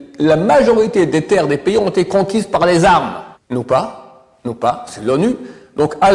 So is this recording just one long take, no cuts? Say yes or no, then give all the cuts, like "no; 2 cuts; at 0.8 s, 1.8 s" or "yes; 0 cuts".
no; 1 cut; at 3.3 s